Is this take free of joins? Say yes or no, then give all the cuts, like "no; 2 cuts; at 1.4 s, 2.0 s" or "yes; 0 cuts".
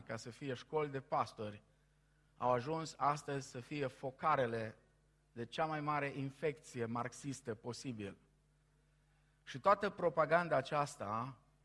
yes; 0 cuts